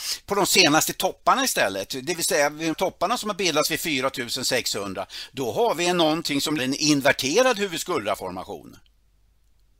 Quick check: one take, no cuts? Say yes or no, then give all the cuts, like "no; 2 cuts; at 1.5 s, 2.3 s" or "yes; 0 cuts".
no; 2 cuts; at 2.7 s, 6.6 s